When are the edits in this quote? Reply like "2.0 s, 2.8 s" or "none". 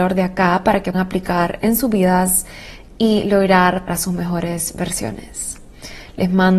0.9 s, 3.9 s